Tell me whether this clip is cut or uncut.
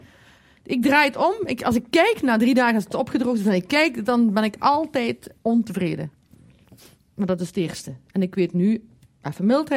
uncut